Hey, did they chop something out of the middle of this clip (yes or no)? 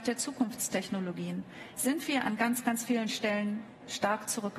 no